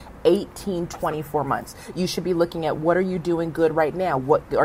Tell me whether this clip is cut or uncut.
uncut